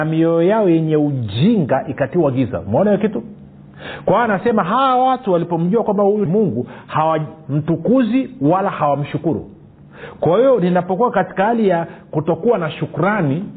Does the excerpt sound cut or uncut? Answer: cut